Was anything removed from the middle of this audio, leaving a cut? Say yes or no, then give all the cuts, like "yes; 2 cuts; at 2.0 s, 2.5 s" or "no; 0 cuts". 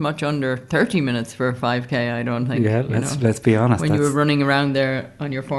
no; 0 cuts